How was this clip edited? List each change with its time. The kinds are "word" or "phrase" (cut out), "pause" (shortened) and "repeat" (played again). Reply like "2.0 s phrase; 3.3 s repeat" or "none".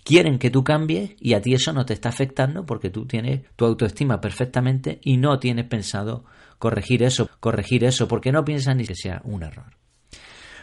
3.5 s pause; 7.3 s repeat; 8.9 s word